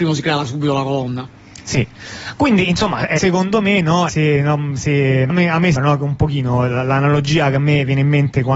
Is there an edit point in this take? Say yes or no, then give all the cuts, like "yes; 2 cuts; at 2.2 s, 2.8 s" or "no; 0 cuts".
yes; 4 cuts; at 3.2 s, 4.1 s, 5.3 s, 5.7 s